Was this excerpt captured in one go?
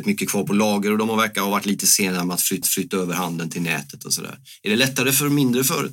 no; 1 cut; at 2.6 s

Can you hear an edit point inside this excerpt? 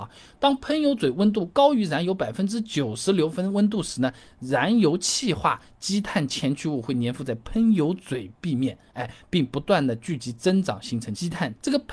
no; 0 cuts

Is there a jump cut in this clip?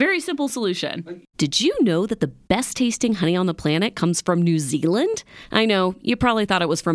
yes; 1 cut; at 1.3 s

